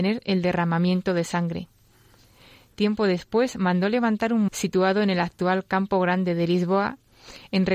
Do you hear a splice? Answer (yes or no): yes